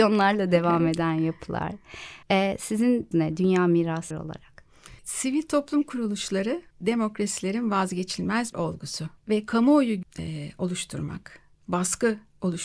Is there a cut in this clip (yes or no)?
yes